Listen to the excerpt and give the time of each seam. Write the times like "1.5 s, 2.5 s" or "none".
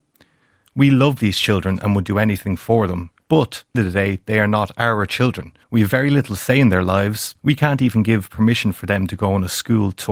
3.7 s, 5.6 s, 7.4 s